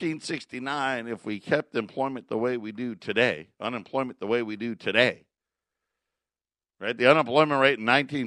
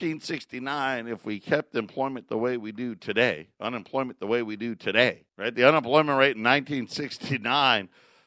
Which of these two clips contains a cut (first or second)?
second